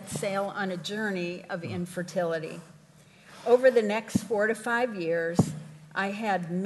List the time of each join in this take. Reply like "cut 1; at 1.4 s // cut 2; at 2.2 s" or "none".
none